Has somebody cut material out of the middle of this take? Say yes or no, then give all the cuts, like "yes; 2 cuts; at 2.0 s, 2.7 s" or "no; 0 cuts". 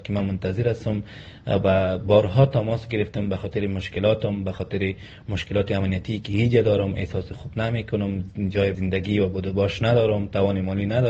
yes; 1 cut; at 8.7 s